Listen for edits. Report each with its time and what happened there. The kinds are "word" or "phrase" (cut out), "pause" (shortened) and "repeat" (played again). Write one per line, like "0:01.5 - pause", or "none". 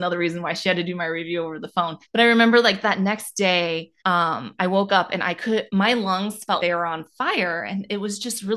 0:02.0 - pause
0:04.0 - pause
0:05.7 - word
0:06.6 - word